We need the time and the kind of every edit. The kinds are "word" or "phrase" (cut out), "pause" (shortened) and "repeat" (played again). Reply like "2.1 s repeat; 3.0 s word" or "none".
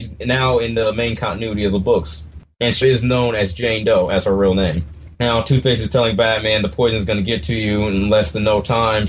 2.8 s word; 5.1 s pause